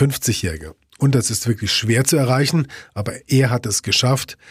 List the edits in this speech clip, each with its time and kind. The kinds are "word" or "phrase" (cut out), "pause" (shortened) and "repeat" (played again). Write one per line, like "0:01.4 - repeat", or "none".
none